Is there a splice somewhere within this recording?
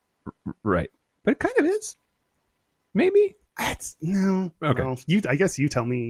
no; 0 cuts

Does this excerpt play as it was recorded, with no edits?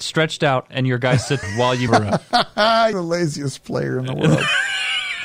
no; 3 cuts; at 1.4 s, 1.9 s, 2.9 s

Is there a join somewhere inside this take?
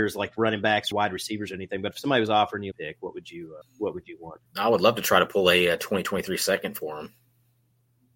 yes; 4 cuts; at 0.9 s, 2.7 s, 3.6 s, 4.5 s

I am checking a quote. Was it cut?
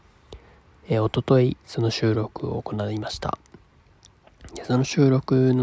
yes; 1 cut; at 1.6 s

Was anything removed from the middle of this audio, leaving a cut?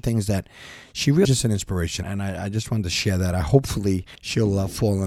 yes; 3 cuts; at 1.2 s, 2.0 s, 4.2 s

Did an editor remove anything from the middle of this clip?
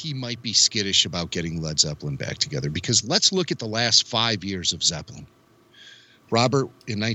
no; 0 cuts

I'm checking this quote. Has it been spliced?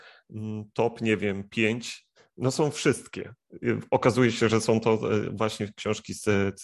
no; 0 cuts

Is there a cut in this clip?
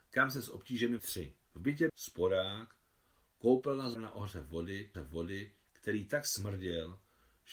yes; 5 cuts; at 1.0 s, 1.4 s, 1.9 s, 4.0 s, 4.9 s

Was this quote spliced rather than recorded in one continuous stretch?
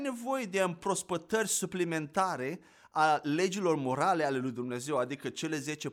no; 0 cuts

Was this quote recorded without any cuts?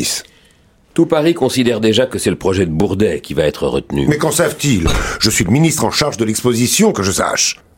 yes; 0 cuts

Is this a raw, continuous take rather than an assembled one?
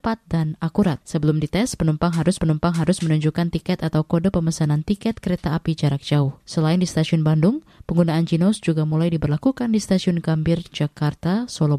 no; 3 cuts; at 1.0 s, 2.4 s, 6.4 s

